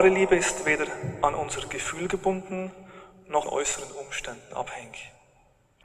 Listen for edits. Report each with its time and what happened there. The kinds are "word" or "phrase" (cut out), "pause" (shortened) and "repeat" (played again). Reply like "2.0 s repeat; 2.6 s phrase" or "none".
3.4 s word